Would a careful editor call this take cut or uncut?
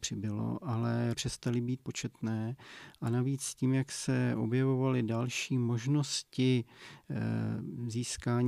cut